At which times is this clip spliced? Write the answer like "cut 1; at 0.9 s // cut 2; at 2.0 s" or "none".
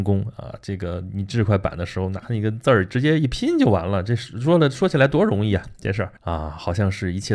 cut 1; at 6.2 s